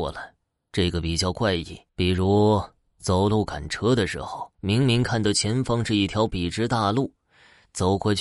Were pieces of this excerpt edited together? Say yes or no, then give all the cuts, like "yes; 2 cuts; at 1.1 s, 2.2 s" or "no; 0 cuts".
yes; 2 cuts; at 1.9 s, 4.5 s